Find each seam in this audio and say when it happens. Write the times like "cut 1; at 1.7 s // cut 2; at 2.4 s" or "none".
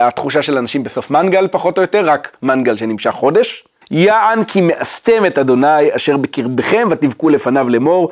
cut 1; at 3.8 s